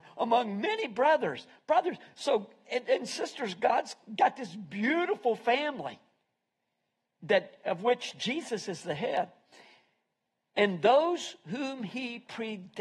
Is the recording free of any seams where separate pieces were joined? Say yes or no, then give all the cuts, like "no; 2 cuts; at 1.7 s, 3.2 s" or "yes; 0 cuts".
yes; 0 cuts